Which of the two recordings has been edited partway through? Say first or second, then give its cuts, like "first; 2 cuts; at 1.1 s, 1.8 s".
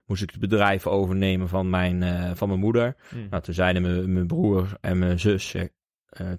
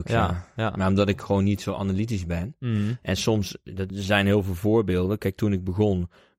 second; 1 cut; at 3.9 s